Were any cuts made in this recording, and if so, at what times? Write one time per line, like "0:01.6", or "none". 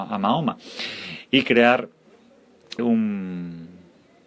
0:02.8